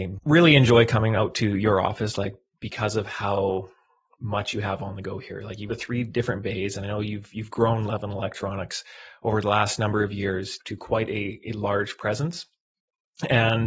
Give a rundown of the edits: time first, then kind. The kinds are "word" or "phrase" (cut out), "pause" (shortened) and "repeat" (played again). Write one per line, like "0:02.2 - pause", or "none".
0:05.7 - word
0:10.6 - word